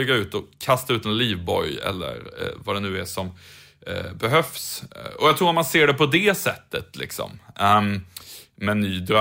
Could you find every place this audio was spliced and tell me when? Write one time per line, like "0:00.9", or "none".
none